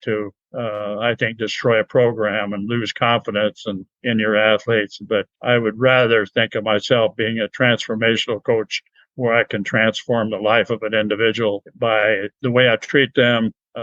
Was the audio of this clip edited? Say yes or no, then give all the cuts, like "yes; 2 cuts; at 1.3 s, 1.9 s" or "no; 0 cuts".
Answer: no; 0 cuts